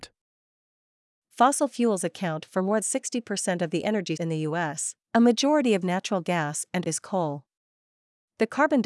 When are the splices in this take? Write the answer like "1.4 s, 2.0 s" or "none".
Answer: 2.8 s, 4.2 s, 5.0 s, 5.8 s, 6.8 s